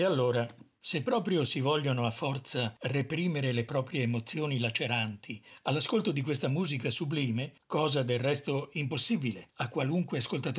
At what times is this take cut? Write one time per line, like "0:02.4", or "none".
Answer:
none